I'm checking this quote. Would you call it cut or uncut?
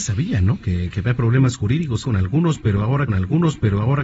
cut